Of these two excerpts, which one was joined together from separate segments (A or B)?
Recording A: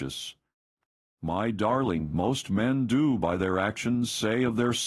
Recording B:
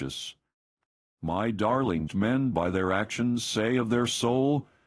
B